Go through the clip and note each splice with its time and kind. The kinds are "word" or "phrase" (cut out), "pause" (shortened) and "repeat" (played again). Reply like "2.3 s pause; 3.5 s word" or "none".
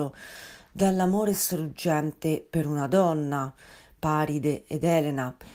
none